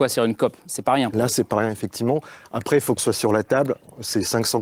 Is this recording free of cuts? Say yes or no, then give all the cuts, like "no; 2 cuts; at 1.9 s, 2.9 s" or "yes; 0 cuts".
no; 1 cut; at 3.0 s